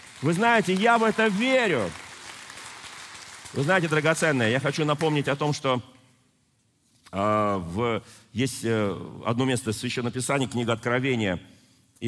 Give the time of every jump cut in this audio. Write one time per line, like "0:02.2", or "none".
none

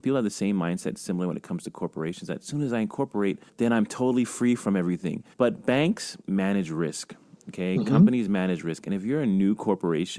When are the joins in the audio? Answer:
0:03.5
0:05.3
0:06.2

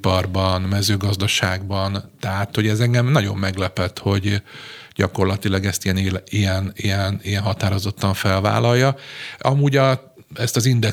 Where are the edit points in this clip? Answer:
none

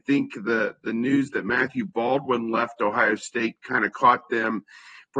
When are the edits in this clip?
none

